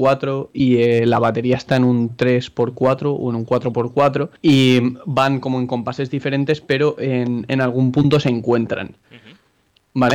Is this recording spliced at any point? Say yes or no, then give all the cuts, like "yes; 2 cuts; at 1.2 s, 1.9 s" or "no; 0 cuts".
yes; 1 cut; at 4.4 s